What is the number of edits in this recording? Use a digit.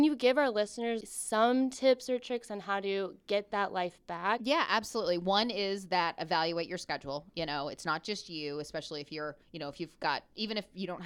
2